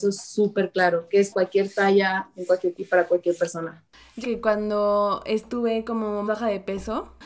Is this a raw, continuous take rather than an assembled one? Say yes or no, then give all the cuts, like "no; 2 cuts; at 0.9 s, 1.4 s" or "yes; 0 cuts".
no; 4 cuts; at 1.3 s, 2.7 s, 4.2 s, 6.3 s